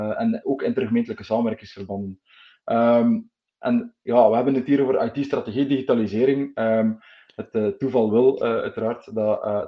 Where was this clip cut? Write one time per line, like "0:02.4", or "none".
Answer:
none